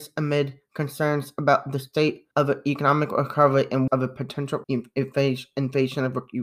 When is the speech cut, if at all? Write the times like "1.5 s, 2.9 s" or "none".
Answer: 2.3 s, 3.9 s, 4.6 s